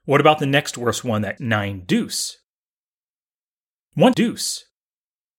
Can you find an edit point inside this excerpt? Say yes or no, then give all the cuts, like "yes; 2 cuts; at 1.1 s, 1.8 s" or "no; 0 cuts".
yes; 2 cuts; at 1.4 s, 4.1 s